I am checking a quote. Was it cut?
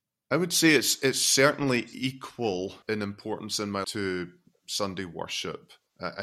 yes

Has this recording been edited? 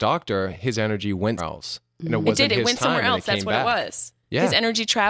yes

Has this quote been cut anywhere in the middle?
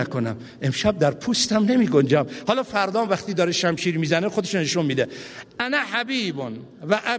no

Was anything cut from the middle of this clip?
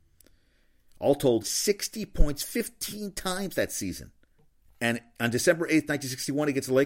yes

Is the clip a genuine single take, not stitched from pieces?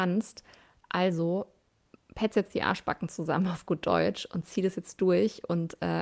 yes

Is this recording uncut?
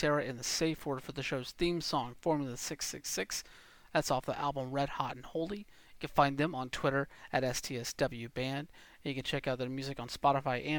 yes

